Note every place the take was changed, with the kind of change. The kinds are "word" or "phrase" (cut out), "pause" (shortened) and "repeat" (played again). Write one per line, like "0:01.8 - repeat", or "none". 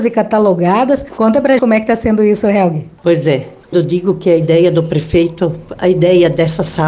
0:01.6 - word
0:03.7 - word